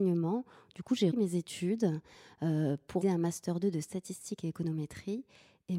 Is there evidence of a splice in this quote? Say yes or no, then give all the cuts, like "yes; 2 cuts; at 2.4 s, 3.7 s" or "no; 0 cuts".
yes; 2 cuts; at 1.1 s, 3.0 s